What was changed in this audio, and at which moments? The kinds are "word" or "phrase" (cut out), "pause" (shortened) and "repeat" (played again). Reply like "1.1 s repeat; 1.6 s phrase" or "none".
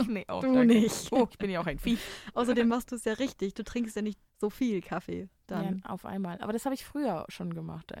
1.3 s word; 4.3 s pause